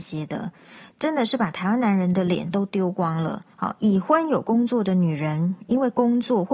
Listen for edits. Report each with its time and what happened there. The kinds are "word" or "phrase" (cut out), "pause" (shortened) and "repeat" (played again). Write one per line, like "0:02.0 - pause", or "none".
0:03.5 - pause